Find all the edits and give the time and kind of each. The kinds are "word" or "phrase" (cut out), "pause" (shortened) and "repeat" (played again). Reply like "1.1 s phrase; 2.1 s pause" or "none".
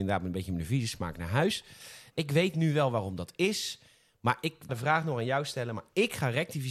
4.7 s word